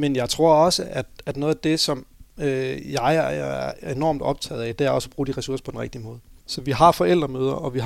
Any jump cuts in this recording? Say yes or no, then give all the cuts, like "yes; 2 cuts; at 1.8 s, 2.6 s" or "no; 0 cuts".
no; 0 cuts